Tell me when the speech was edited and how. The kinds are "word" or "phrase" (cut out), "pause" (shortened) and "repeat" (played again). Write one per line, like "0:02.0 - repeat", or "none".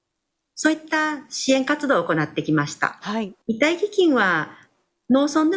0:03.4 - pause